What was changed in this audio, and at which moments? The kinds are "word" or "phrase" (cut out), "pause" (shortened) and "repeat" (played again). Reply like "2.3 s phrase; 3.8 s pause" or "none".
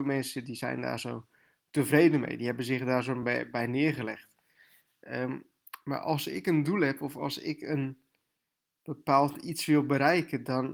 none